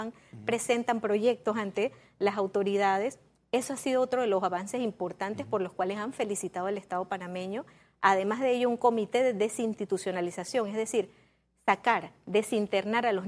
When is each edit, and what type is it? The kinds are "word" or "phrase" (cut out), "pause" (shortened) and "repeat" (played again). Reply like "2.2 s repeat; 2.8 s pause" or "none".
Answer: none